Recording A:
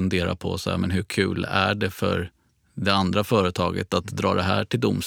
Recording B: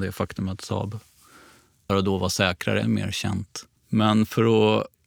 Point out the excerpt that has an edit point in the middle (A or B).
B